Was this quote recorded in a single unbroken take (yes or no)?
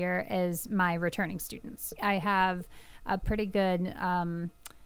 yes